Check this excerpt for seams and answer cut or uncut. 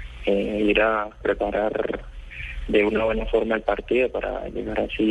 cut